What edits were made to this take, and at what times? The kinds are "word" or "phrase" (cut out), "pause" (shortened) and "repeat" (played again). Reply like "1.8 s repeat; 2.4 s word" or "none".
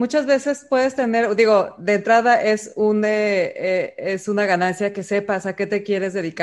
none